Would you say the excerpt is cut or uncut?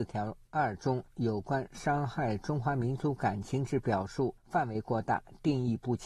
cut